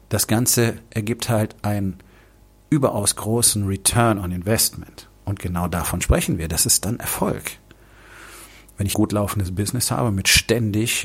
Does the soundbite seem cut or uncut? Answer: cut